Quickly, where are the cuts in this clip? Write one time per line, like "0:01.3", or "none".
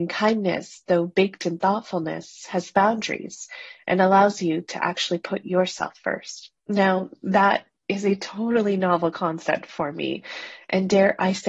0:06.6